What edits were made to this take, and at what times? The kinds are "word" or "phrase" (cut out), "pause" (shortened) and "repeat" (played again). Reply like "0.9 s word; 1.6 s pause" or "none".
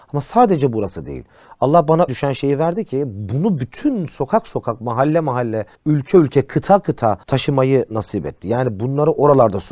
2.1 s phrase; 5.7 s pause; 7.2 s pause

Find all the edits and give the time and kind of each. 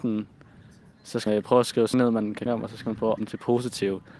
1.3 s phrase; 1.9 s word; 2.5 s phrase; 3.2 s word

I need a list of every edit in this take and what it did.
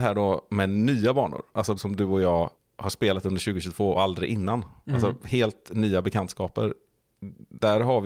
1.8 s word; 2.5 s pause; 3.9 s word

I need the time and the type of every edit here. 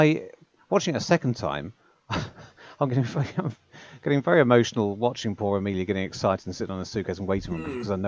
none

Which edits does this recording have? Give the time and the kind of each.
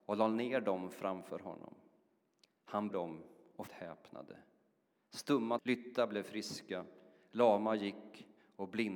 2.9 s word; 3.7 s word; 5.6 s word

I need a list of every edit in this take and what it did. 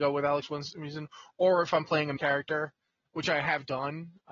2.2 s word

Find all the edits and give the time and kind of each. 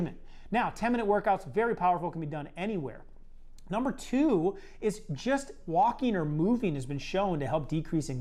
none

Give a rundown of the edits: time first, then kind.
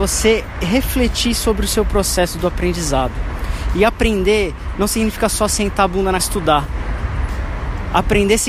6.2 s word

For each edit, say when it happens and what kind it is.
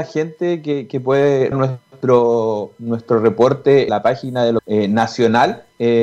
1.5 s word; 3.9 s word; 4.6 s word

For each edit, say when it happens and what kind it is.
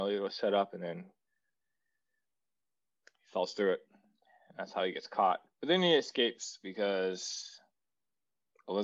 none

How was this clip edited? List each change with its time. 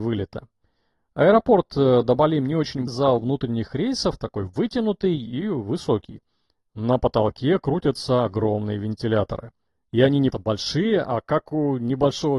2.9 s word; 10.3 s word

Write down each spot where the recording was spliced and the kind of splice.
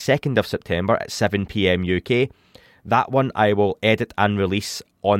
none

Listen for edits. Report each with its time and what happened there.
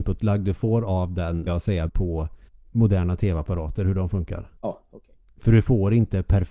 1.5 s word; 1.9 s word; 2.5 s pause; 4.6 s pause

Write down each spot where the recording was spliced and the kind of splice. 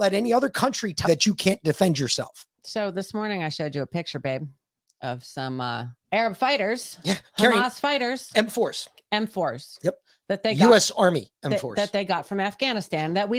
1.0 s word; 2.5 s pause; 6.0 s pause

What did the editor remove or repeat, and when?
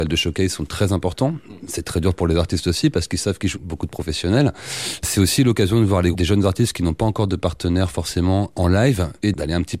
3.5 s word; 6.1 s word

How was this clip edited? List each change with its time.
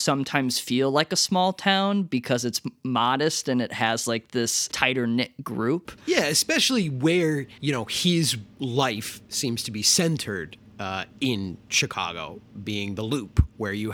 7.6 s pause; 8.5 s pause

